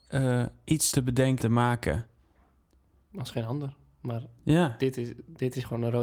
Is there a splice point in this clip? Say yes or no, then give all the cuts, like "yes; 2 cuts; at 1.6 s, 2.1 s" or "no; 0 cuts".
yes; 2 cuts; at 0.9 s, 1.4 s